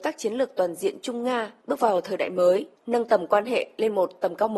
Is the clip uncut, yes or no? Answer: no